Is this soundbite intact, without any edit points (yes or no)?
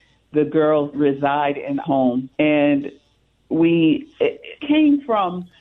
no